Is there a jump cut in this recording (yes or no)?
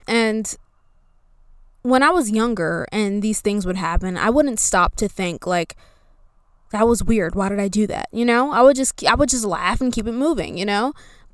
no